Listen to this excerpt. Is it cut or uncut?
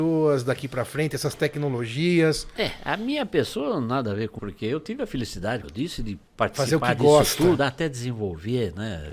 cut